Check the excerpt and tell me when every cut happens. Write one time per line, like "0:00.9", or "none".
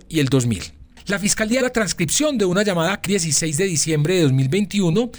0:01.6
0:03.1